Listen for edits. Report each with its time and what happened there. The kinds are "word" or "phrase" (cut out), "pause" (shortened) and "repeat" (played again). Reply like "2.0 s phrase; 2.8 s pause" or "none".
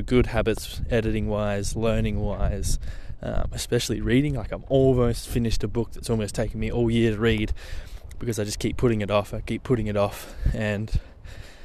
none